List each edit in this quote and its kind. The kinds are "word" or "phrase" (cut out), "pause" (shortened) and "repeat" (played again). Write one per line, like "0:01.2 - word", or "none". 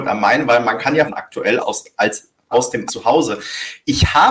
0:01.1 - phrase
0:01.6 - word
0:02.5 - word
0:02.9 - word